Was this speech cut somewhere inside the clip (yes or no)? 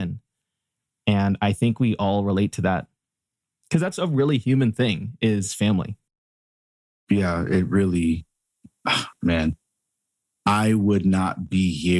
no